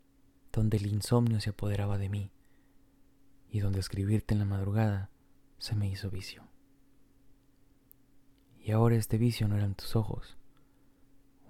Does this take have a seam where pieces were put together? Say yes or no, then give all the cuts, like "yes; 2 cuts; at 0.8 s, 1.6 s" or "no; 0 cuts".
no; 0 cuts